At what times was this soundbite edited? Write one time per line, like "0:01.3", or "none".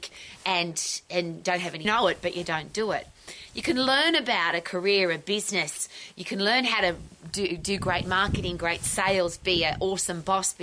0:01.8